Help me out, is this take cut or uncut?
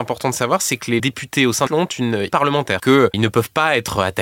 cut